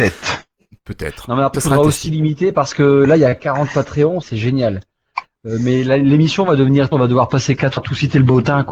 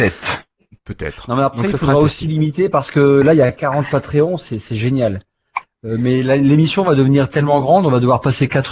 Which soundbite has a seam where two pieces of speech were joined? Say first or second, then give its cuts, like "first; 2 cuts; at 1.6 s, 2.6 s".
first; 4 cuts; at 1.5 s, 4.2 s, 6.9 s, 7.8 s